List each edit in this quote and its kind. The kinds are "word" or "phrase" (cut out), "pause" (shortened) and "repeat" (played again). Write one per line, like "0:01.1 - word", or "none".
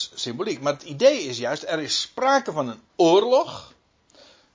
none